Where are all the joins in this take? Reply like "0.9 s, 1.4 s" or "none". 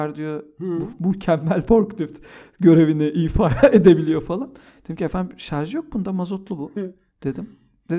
none